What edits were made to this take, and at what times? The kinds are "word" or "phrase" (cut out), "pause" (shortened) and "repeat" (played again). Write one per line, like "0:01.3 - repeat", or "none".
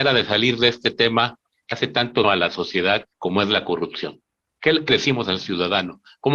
0:01.7 - word
0:02.2 - word
0:03.1 - pause
0:04.9 - word